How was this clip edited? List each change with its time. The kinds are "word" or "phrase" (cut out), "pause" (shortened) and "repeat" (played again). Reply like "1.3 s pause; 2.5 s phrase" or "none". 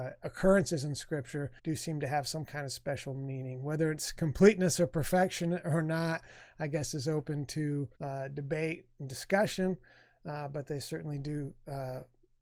1.6 s pause; 7.9 s pause